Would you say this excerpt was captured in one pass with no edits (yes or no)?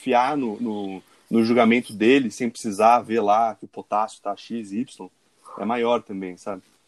yes